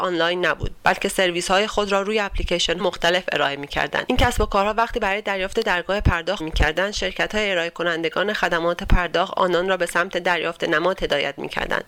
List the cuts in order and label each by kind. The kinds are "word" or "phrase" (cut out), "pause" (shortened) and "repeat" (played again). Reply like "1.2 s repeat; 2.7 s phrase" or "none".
2.8 s word; 6.4 s word